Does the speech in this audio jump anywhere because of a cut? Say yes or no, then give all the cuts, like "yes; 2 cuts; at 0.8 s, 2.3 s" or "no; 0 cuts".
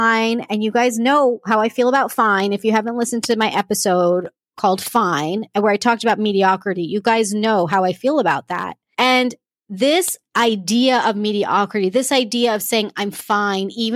no; 0 cuts